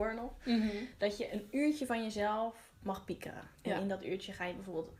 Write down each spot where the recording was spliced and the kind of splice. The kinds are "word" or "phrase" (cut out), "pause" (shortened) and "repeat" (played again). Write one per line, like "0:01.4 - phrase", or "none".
none